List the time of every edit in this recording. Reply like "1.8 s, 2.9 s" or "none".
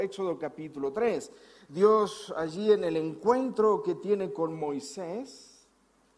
none